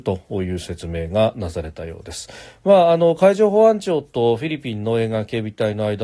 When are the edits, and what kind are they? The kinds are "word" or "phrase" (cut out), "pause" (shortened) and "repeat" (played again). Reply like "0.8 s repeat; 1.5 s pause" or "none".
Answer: none